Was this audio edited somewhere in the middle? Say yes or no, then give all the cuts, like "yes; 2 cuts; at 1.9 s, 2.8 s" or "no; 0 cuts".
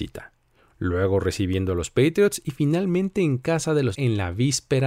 yes; 1 cut; at 3.9 s